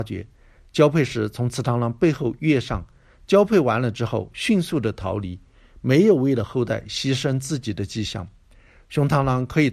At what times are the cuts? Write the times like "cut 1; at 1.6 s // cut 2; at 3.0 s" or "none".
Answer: none

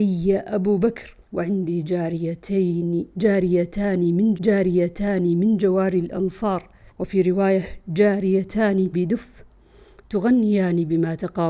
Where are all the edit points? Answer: cut 1; at 1.2 s // cut 2; at 4.3 s // cut 3; at 6.9 s // cut 4; at 8.9 s

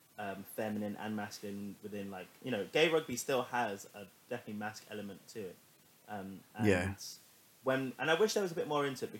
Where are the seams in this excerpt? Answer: none

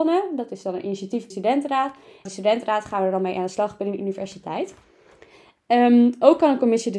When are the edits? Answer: cut 1; at 1.3 s // cut 2; at 2.3 s

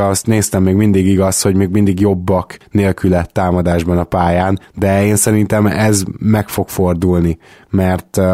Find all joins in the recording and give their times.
none

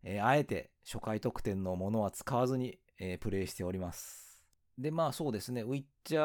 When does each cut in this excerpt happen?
cut 1; at 4.6 s

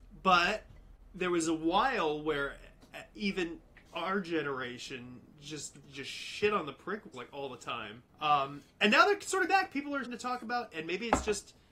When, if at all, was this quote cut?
cut 1; at 3.9 s // cut 2; at 5.8 s // cut 3; at 7.1 s // cut 4; at 8.1 s // cut 5; at 9.5 s // cut 6; at 10.0 s

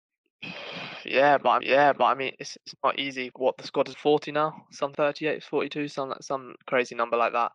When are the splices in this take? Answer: cut 1; at 1.6 s // cut 2; at 3.3 s // cut 3; at 3.9 s // cut 4; at 4.9 s

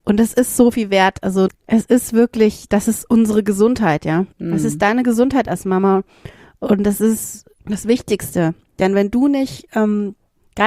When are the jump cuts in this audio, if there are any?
cut 1; at 1.5 s // cut 2; at 4.3 s // cut 3; at 7.6 s

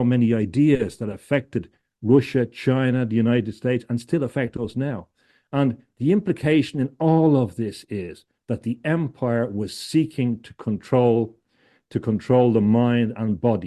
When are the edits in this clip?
none

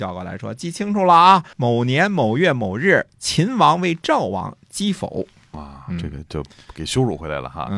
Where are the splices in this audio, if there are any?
cut 1; at 1.5 s

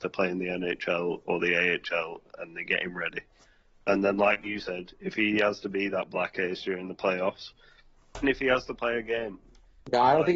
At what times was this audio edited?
cut 1; at 8.2 s

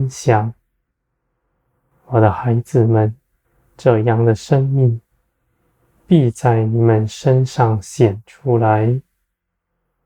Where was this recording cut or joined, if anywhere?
cut 1; at 3.4 s

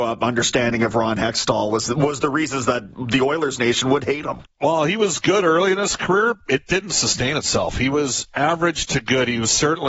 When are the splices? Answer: cut 1; at 4.5 s

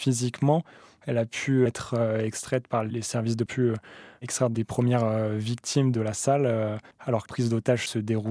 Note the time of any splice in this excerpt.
cut 1; at 1.7 s // cut 2; at 3.5 s // cut 3; at 6.9 s // cut 4; at 7.3 s

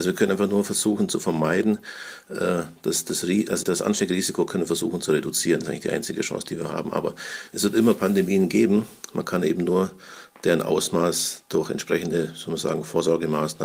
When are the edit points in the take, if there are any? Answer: cut 1; at 3.6 s

